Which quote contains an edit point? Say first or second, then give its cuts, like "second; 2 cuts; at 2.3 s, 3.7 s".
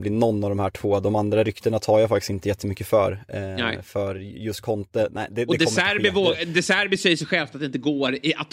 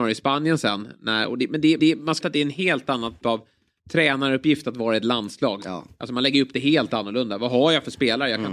second; 4 cuts; at 1.8 s, 2.2 s, 3.2 s, 3.8 s